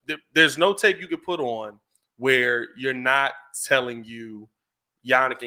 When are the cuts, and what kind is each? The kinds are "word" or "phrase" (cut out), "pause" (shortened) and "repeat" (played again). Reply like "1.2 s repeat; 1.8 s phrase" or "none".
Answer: none